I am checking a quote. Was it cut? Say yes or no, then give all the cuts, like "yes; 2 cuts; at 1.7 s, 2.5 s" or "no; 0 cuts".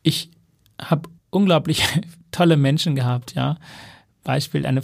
yes; 1 cut; at 1.2 s